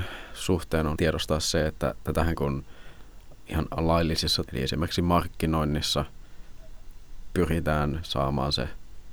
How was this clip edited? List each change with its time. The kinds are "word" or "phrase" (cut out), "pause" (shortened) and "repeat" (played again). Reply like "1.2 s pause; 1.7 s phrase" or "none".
1.0 s word; 2.4 s phrase; 4.5 s word